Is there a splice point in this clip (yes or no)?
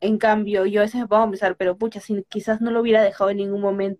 no